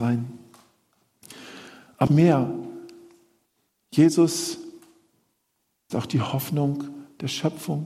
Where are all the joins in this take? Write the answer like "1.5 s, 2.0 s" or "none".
2.1 s, 5.9 s